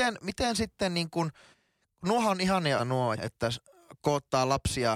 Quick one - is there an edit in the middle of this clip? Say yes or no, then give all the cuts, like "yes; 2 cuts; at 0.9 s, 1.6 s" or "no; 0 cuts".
yes; 3 cuts; at 1.5 s, 2.8 s, 3.2 s